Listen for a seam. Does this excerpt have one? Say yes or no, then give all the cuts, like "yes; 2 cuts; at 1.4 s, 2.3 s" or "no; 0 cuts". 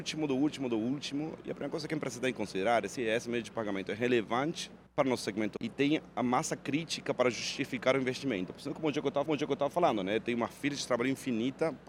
yes; 4 cuts; at 3.0 s, 4.9 s, 5.6 s, 9.3 s